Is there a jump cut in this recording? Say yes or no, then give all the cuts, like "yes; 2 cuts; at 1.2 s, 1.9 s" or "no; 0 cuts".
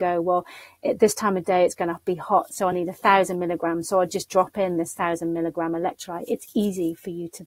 no; 0 cuts